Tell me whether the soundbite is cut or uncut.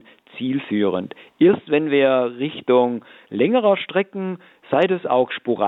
uncut